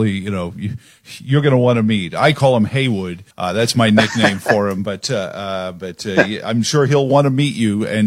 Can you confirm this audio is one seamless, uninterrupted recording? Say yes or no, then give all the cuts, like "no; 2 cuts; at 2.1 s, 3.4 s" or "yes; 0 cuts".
no; 1 cut; at 3.3 s